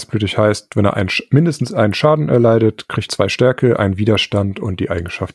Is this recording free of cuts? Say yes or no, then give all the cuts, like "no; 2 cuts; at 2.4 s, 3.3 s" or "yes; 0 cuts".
no; 1 cut; at 3.1 s